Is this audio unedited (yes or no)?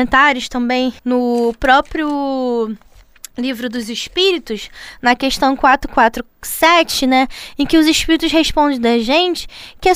no